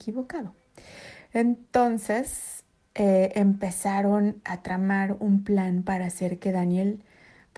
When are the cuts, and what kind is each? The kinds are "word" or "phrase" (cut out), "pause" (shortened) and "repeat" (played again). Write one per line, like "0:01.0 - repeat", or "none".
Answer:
none